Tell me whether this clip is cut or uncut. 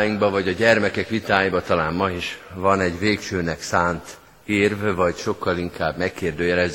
uncut